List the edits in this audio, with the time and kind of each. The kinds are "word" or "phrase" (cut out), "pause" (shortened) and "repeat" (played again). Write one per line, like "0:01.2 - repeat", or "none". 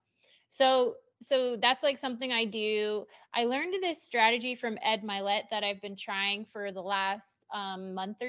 none